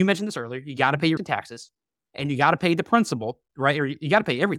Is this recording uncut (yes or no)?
no